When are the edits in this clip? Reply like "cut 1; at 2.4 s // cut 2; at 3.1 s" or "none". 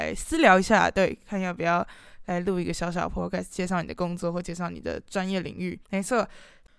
cut 1; at 5.8 s

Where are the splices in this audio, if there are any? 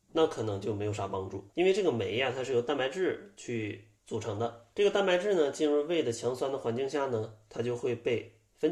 cut 1; at 1.5 s // cut 2; at 4.0 s // cut 3; at 4.7 s

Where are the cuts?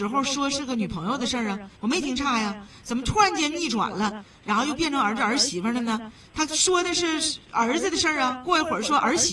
cut 1; at 1.7 s

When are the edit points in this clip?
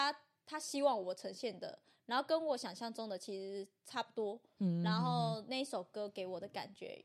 none

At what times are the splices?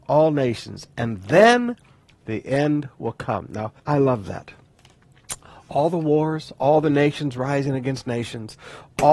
cut 1; at 3.8 s

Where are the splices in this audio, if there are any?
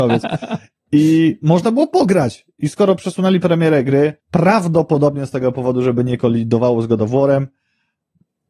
cut 1; at 4.2 s

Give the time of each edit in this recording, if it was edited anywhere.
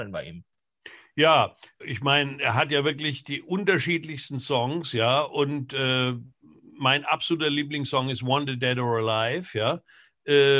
cut 1; at 1.8 s

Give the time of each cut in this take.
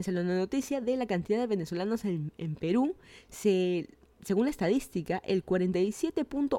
none

